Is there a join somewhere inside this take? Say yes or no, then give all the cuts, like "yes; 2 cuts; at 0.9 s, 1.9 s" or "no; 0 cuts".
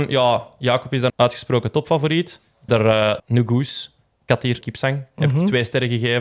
yes; 4 cuts; at 1.1 s, 2.7 s, 3.2 s, 4.6 s